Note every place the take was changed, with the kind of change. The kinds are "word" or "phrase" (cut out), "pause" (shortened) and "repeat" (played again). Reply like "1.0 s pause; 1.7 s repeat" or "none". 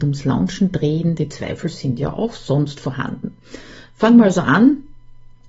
none

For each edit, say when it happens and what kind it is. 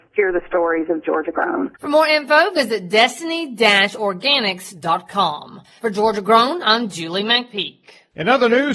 none

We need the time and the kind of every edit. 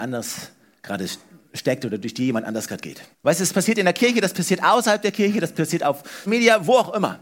3.1 s pause; 6.3 s word

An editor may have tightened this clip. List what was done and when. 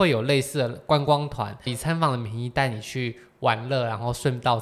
1.7 s word

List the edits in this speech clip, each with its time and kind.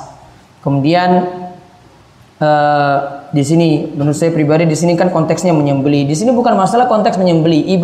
none

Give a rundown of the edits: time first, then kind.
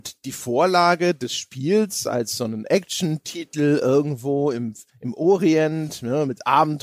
4.9 s pause

